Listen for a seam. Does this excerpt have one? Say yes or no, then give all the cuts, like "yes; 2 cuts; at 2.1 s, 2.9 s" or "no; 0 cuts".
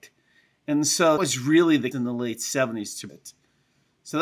yes; 3 cuts; at 1.2 s, 1.9 s, 3.1 s